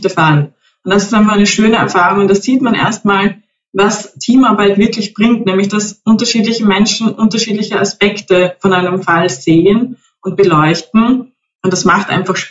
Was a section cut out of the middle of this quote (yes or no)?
no